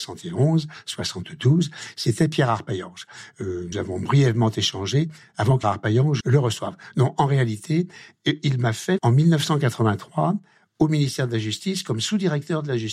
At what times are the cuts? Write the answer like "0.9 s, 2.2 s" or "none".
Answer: 3.7 s, 5.6 s, 6.2 s, 9.0 s